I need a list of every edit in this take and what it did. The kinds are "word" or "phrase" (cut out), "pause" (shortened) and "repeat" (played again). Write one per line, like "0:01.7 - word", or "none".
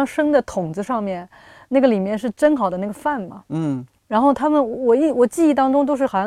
none